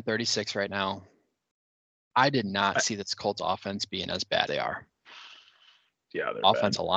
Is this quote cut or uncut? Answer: cut